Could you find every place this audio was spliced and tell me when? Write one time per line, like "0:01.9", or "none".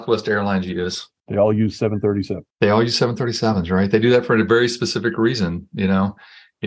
0:01.1
0:02.5